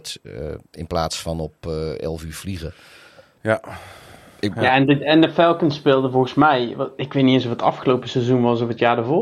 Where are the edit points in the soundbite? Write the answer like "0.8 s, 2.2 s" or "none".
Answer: none